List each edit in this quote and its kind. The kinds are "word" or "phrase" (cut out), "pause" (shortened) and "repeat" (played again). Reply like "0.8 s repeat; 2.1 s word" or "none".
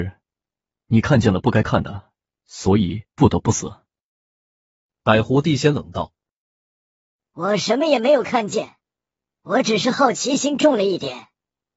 none